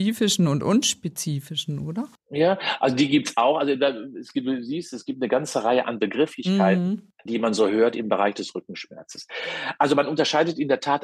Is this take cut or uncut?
cut